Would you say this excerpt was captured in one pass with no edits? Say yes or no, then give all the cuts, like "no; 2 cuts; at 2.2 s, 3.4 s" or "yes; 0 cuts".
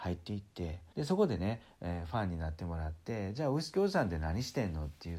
no; 1 cut; at 0.9 s